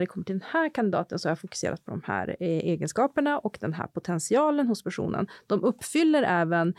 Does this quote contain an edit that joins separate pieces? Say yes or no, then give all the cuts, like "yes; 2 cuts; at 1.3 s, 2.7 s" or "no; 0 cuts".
no; 0 cuts